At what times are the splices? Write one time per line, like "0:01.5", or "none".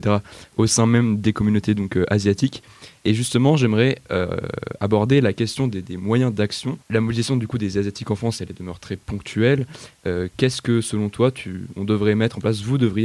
0:06.8

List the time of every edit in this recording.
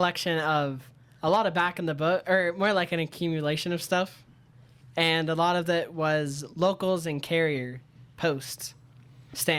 none

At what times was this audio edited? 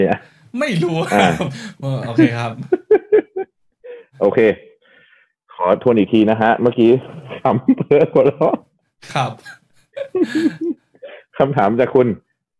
none

